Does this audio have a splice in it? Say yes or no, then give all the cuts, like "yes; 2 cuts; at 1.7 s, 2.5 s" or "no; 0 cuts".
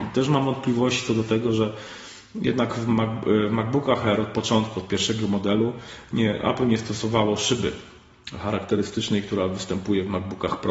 no; 0 cuts